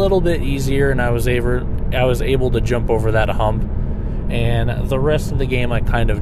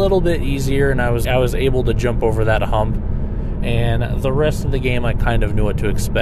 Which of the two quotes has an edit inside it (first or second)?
second